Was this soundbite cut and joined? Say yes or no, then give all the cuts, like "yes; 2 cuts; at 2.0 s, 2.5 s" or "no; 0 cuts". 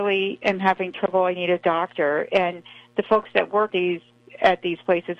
yes; 1 cut; at 3.7 s